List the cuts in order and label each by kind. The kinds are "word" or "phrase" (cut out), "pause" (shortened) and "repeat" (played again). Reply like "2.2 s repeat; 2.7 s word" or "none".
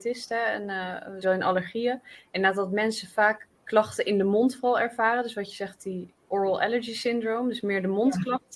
1.2 s word; 3.5 s pause